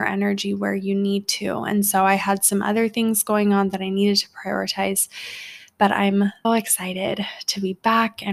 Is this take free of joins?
no; 1 cut; at 6.4 s

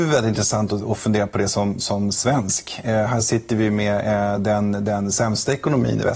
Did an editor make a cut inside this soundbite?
no; 0 cuts

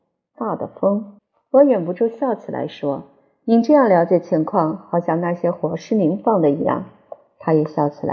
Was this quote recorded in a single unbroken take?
no; 1 cut; at 1.2 s

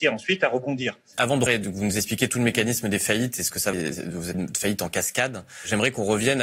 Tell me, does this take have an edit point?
yes; 3 cuts; at 1.5 s, 3.7 s, 4.3 s

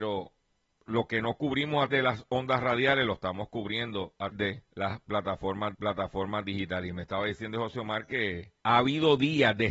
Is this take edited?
yes; 5 cuts; at 1.9 s, 4.3 s, 4.7 s, 5.7 s, 8.6 s

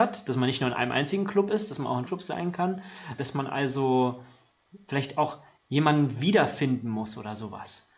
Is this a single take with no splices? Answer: no; 3 cuts; at 2.0 s, 3.2 s, 5.6 s

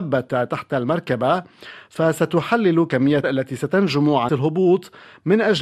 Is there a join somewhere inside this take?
yes; 2 cuts; at 3.2 s, 4.3 s

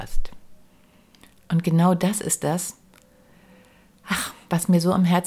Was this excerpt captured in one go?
yes; 0 cuts

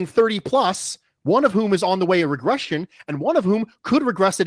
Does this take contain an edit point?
no; 0 cuts

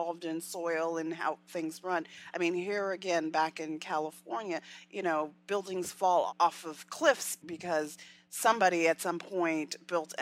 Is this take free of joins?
yes; 0 cuts

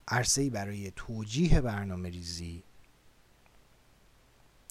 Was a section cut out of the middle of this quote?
no; 0 cuts

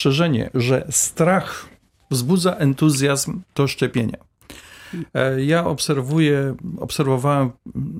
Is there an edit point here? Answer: no; 0 cuts

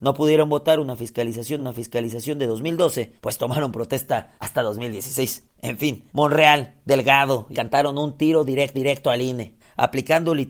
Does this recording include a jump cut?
yes; 8 cuts; at 1.6 s, 3.2 s, 4.4 s, 5.5 s, 6.1 s, 7.5 s, 8.7 s, 9.6 s

